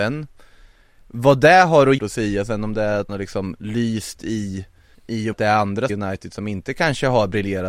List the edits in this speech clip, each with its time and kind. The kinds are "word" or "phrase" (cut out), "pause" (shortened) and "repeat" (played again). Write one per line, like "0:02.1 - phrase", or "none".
0:02.0 - phrase
0:03.1 - word
0:04.9 - pause
0:05.3 - word
0:05.9 - word